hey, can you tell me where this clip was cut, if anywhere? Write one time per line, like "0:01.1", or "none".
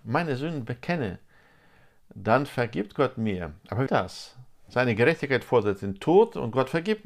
0:03.9